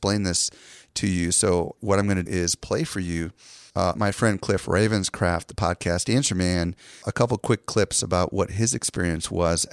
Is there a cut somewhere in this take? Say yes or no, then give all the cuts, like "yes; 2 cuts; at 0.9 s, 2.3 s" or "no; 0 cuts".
yes; 4 cuts; at 1.8 s, 2.3 s, 4.0 s, 7.0 s